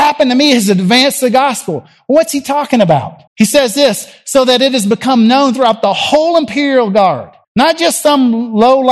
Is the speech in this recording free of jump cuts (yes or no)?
no